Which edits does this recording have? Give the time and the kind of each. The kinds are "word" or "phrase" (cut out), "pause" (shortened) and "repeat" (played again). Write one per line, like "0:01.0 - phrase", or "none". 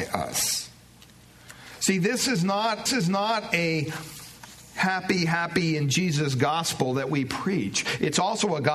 0:02.9 - repeat

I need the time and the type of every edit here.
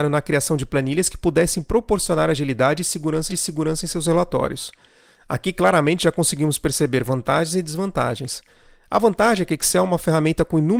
0:03.3 - repeat

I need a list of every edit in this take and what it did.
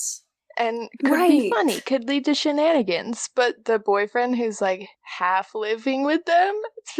0:01.0 - word
0:04.9 - pause

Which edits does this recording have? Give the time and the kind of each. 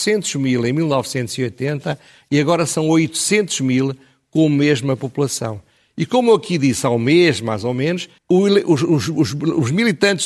0:08.2 - pause

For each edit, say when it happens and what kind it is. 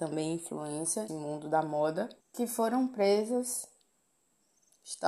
0:01.1 - word
0:02.2 - pause

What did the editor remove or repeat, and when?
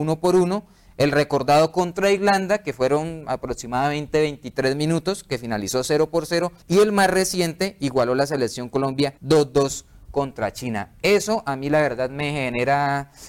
0:06.6 - pause
0:09.2 - pause

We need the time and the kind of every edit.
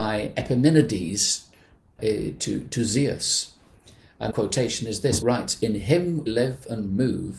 0:02.0 - word
0:04.3 - word
0:05.2 - word
0:06.3 - word

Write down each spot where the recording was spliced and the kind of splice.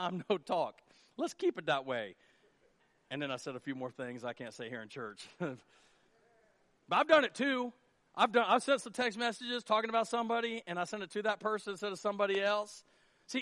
none

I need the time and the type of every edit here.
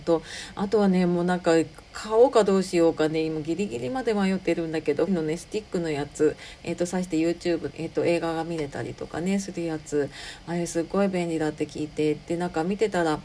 0:05.1 - word
0:07.7 - phrase

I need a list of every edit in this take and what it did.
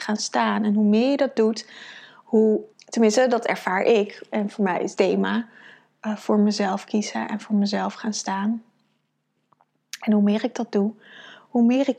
0:02.7 - word
0:05.0 - phrase

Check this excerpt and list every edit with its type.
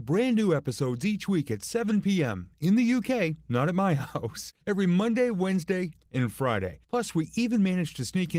0:04.6 - pause
0:06.8 - pause

